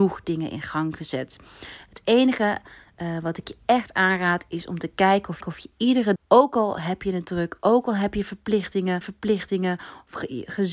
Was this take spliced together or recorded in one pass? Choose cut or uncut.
cut